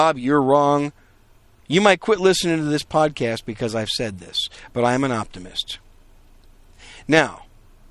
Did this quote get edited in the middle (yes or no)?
no